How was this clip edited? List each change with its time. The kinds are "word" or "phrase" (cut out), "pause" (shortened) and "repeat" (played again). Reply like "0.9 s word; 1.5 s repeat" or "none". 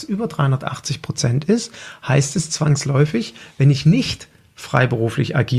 none